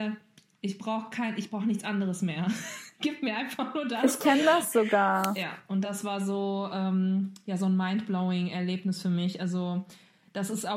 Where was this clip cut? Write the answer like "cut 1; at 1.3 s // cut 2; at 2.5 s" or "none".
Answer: none